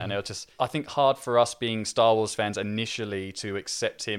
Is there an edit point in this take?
no; 0 cuts

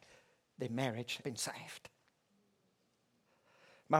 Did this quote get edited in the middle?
yes; 1 cut; at 1.2 s

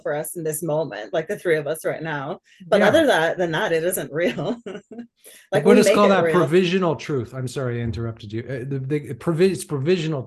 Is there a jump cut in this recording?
no; 0 cuts

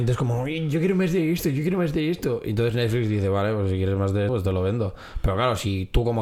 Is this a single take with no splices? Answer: no; 1 cut; at 4.3 s

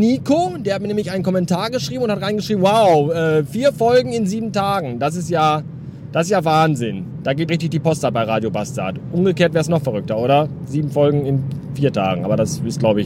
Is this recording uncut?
no; 1 cut; at 7.5 s

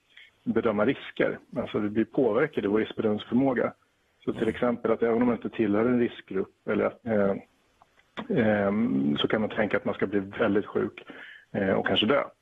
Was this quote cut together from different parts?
yes; 1 cut; at 7.0 s

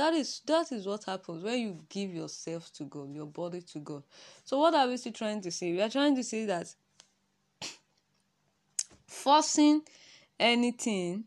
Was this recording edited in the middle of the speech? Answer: no; 0 cuts

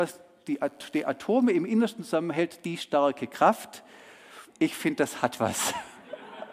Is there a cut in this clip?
yes; 1 cut; at 4.5 s

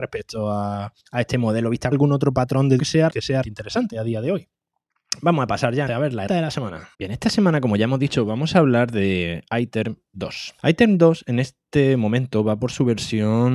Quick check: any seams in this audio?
yes; 9 cuts; at 1.0 s, 1.9 s, 2.8 s, 3.1 s, 3.4 s, 5.9 s, 6.3 s, 6.9 s, 10.6 s

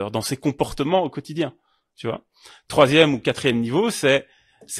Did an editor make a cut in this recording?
no; 0 cuts

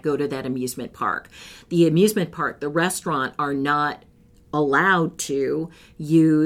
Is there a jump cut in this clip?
no; 0 cuts

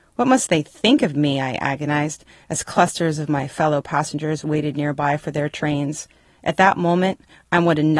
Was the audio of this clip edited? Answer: no; 0 cuts

